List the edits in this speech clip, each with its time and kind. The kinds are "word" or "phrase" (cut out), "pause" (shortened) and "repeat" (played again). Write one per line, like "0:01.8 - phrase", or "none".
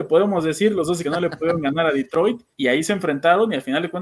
0:01.0 - word
0:02.5 - pause